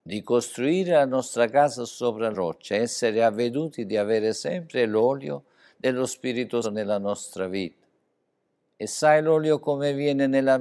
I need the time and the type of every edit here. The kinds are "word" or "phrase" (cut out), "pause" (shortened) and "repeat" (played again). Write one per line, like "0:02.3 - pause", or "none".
0:02.3 - word
0:06.6 - word